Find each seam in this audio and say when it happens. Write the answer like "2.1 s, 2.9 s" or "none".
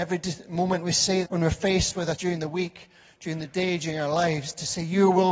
1.2 s, 2.2 s